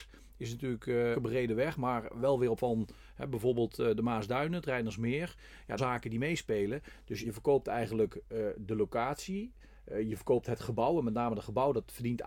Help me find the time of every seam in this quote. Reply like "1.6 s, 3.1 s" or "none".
1.1 s, 2.6 s, 5.8 s, 7.2 s